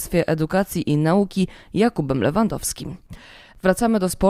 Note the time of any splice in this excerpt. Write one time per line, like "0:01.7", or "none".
none